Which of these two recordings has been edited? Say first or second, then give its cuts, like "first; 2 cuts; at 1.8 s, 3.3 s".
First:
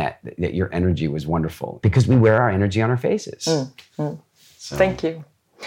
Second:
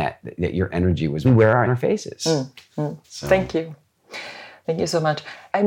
second; 3 cuts; at 1.2 s, 1.7 s, 3.0 s